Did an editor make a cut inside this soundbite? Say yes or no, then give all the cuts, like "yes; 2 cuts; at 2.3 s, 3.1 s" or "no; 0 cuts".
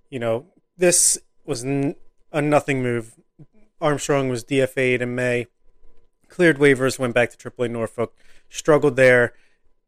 no; 0 cuts